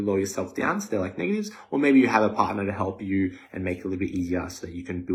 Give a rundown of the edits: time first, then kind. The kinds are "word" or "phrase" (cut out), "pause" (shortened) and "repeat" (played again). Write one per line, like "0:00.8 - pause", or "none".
none